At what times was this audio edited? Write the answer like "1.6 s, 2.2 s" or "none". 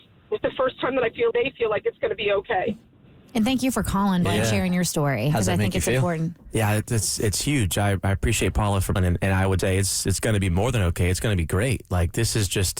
1.3 s, 4.3 s, 9.0 s, 9.6 s